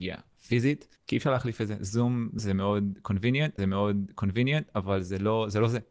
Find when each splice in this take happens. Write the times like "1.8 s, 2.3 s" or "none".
1.0 s, 2.4 s, 3.6 s